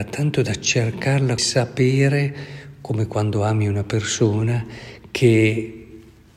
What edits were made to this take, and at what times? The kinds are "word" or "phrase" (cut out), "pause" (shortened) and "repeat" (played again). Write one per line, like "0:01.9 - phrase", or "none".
0:01.4 - phrase

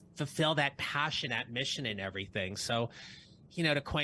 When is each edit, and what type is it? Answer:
0:01.3 - word

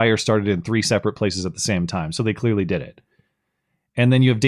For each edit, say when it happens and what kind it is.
none

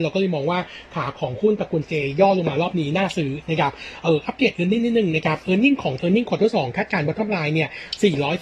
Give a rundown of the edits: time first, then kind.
0:06.0 - word

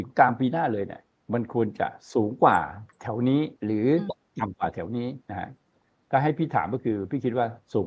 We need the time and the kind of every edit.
0:02.9 - pause
0:03.6 - pause
0:05.2 - pause

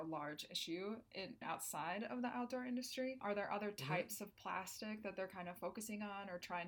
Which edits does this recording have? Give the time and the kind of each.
0:01.4 - word
0:03.2 - word

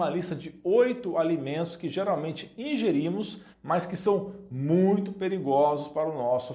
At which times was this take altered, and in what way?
0:03.5 - pause

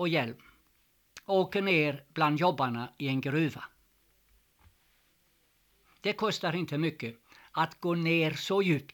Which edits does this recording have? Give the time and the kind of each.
none

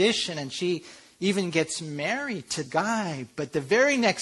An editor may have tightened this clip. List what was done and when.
0:02.7 - word

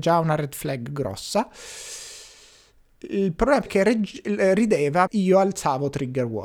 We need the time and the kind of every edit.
0:03.7 - word
0:05.1 - word

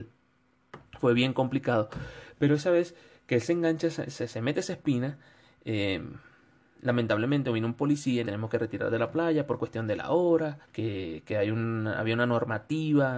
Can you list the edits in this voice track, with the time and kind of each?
0:08.2 - phrase
0:10.6 - pause

